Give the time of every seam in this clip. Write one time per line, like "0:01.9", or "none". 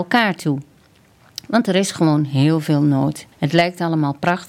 0:03.3